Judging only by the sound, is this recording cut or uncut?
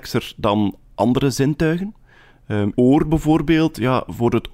cut